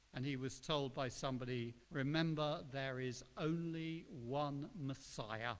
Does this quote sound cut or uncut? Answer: cut